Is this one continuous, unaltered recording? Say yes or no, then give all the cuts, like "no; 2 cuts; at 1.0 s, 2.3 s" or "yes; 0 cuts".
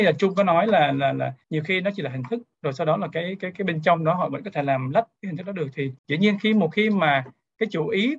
no; 2 cuts; at 1.4 s, 6.0 s